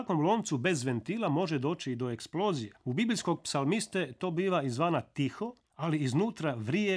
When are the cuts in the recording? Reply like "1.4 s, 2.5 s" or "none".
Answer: 2.8 s, 5.6 s

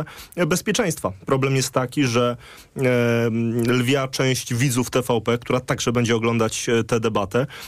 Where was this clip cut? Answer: none

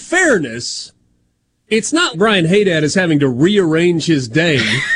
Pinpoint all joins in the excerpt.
2.1 s

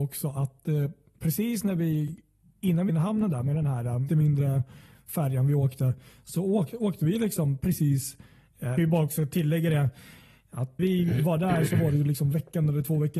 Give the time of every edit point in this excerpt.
2.9 s, 4.1 s, 8.8 s, 10.8 s

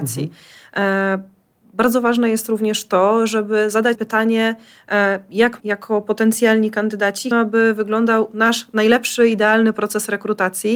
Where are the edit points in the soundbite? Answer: 3.9 s, 5.6 s, 7.3 s

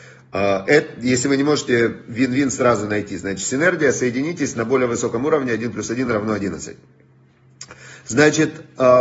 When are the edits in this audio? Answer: none

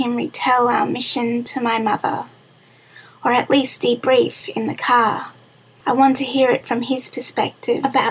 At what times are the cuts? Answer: none

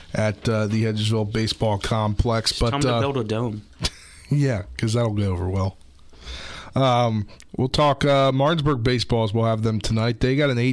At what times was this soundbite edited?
7.5 s

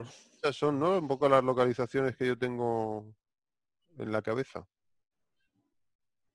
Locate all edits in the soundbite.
none

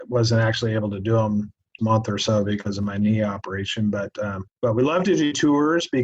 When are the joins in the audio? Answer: 1.8 s, 4.5 s

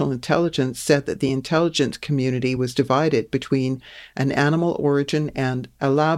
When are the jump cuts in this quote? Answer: none

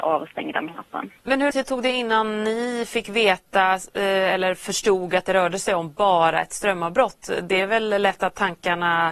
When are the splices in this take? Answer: 1.2 s, 1.5 s

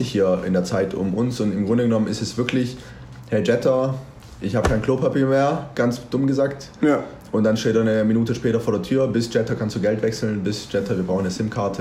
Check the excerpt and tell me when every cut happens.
none

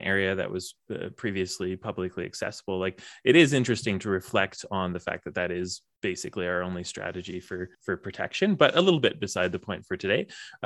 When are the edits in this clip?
7.7 s

